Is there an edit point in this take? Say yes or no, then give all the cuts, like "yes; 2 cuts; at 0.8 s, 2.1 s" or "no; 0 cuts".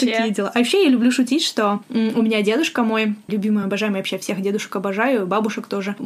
no; 0 cuts